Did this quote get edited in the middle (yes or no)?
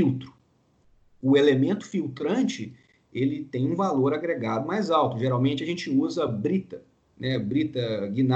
no